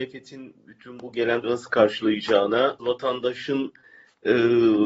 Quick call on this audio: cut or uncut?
cut